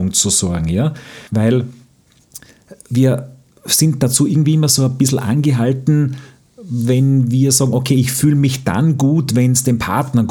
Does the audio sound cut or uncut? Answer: cut